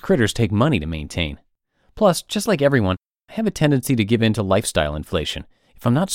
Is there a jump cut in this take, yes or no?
no